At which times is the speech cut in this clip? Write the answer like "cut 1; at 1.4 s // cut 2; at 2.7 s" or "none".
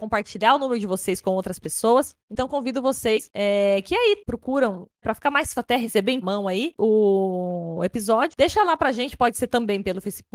cut 1; at 2.2 s // cut 2; at 5.0 s // cut 3; at 5.6 s // cut 4; at 6.2 s